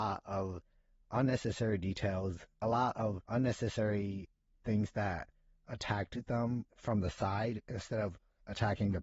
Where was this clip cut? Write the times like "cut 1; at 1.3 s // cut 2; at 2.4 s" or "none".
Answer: cut 1; at 3.2 s // cut 2; at 6.7 s